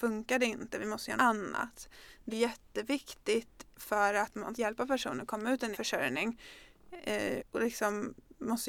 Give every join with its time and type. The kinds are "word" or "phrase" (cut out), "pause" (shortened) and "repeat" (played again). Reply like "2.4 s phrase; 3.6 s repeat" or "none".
1.2 s word; 2.3 s word; 3.7 s word; 4.5 s word; 5.7 s word; 7.4 s word